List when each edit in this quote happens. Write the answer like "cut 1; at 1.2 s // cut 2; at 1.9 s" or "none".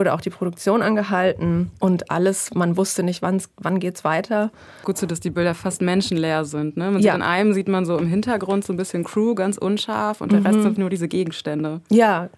cut 1; at 4.8 s // cut 2; at 10.8 s